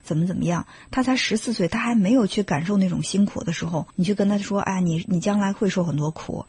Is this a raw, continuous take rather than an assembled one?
no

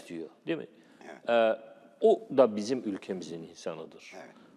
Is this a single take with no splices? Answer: yes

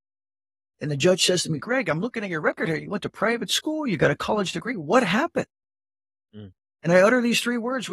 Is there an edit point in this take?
no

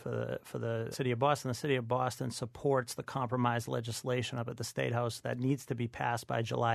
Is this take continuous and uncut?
no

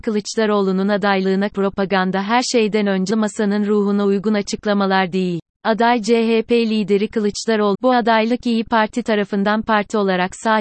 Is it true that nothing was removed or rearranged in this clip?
no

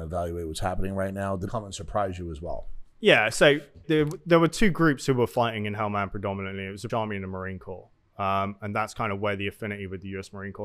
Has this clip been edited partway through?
yes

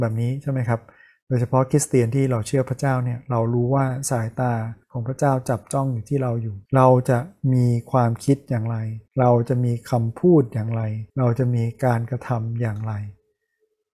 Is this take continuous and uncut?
no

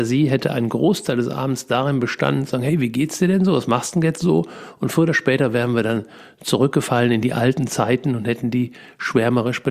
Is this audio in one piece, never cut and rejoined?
yes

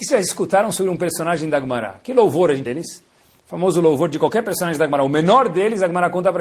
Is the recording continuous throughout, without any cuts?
no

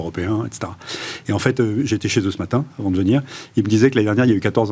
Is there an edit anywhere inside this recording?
no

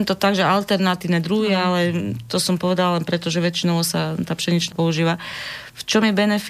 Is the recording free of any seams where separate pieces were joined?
no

